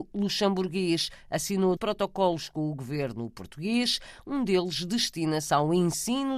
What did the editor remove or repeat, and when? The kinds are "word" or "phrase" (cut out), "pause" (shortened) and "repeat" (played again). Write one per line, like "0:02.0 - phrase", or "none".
0:01.8 - word